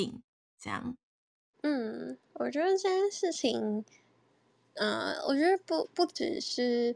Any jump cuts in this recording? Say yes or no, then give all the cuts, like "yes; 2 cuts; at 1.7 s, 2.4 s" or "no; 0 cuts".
no; 0 cuts